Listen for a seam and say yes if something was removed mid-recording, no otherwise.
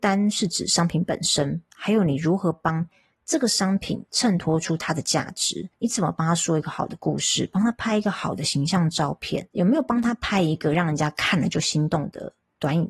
no